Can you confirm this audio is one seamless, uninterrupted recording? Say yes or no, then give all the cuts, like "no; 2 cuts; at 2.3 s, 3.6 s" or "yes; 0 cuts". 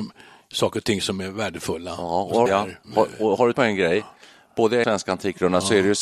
no; 4 cuts; at 2.5 s, 2.8 s, 3.5 s, 4.8 s